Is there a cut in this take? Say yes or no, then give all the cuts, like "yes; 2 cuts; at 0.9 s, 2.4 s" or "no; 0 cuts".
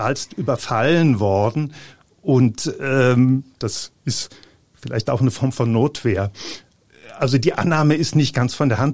no; 0 cuts